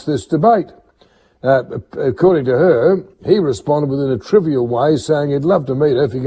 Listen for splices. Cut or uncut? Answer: cut